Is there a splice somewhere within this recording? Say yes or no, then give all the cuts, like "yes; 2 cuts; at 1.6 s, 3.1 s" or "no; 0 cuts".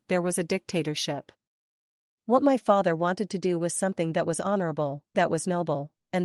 yes; 1 cut; at 5.1 s